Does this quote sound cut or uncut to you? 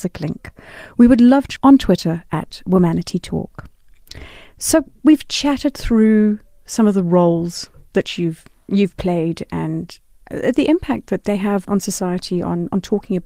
cut